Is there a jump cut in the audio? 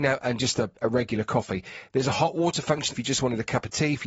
yes; 1 cut; at 2.9 s

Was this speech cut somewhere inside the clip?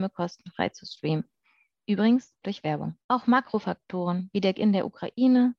yes; 3 cuts; at 2.4 s, 3.0 s, 4.5 s

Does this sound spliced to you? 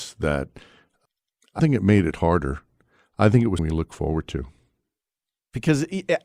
yes; 2 cuts; at 1.6 s, 3.6 s

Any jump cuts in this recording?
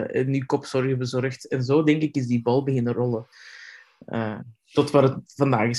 no; 0 cuts

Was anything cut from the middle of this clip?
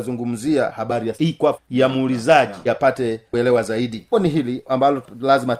yes; 4 cuts; at 1.1 s, 1.5 s, 2.7 s, 4.1 s

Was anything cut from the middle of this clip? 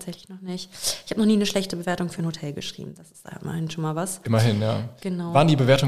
no; 0 cuts

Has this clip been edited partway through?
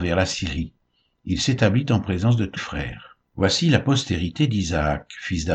yes; 2 cuts; at 2.6 s, 3.3 s

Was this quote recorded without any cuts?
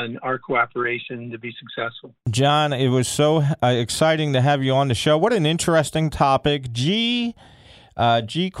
yes; 0 cuts

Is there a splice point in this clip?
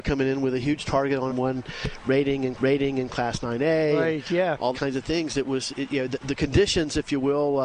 yes; 5 cuts; at 1.3 s, 2.5 s, 4.7 s, 5.7 s, 6.2 s

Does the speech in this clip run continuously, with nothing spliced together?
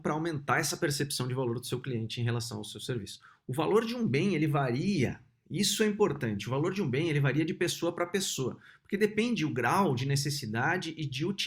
yes; 0 cuts

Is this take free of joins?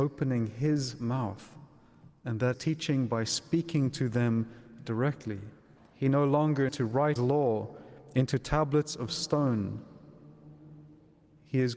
no; 4 cuts; at 2.5 s, 5.8 s, 6.7 s, 7.2 s

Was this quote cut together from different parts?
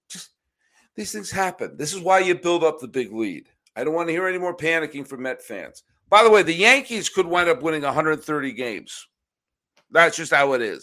no; 0 cuts

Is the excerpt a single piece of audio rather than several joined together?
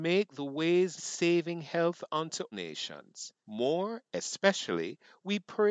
no; 3 cuts; at 1.0 s, 2.5 s, 3.4 s

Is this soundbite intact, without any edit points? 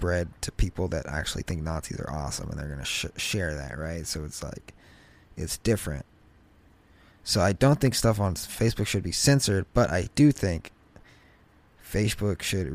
yes; 0 cuts

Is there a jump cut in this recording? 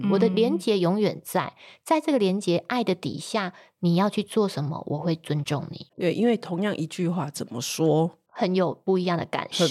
yes; 1 cut; at 5.9 s

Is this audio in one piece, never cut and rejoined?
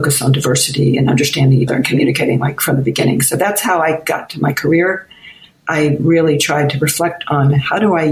no; 1 cut; at 1.7 s

